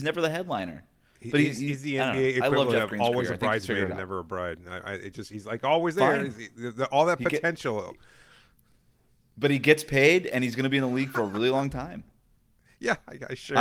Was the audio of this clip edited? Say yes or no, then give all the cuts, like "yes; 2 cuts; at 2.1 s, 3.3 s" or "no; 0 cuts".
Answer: no; 0 cuts